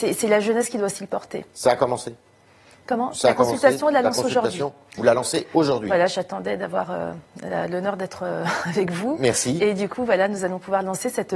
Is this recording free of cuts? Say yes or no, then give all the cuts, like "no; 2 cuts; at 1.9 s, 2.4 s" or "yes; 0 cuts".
yes; 0 cuts